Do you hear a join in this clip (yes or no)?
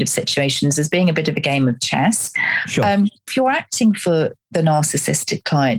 yes